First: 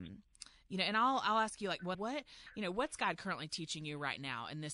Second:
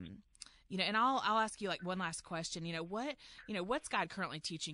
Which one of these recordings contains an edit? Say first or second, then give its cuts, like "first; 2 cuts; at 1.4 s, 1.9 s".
first; 1 cut; at 1.9 s